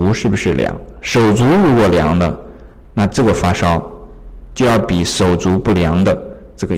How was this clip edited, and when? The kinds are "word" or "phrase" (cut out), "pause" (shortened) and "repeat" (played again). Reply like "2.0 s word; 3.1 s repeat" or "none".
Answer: none